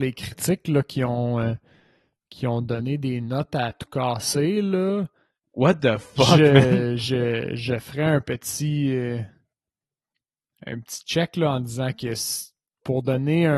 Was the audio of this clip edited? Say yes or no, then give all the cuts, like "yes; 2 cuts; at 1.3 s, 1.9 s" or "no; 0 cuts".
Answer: no; 0 cuts